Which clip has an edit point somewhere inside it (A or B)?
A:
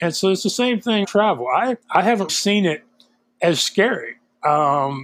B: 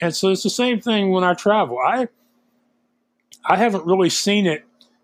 A